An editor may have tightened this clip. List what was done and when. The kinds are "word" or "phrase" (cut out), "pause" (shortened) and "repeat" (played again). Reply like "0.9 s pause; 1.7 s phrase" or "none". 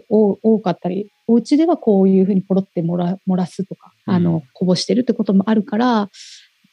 4.0 s pause